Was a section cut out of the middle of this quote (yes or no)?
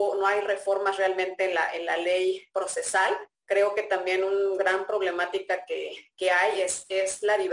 yes